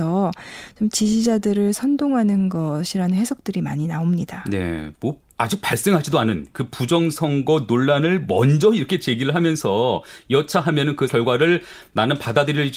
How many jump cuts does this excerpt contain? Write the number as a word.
two